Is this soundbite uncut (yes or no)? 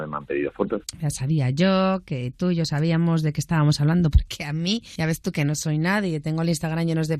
yes